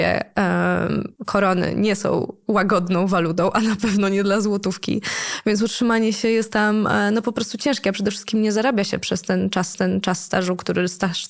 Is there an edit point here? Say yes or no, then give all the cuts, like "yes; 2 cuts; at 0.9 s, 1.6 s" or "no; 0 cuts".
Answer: yes; 2 cuts; at 1.2 s, 9.7 s